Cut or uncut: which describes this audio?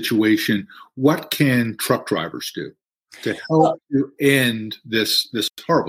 uncut